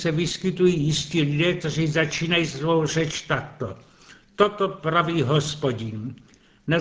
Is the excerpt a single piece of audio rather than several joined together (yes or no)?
yes